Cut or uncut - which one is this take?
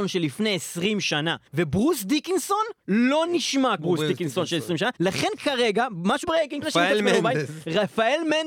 cut